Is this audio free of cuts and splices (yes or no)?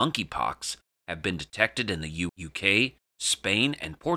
no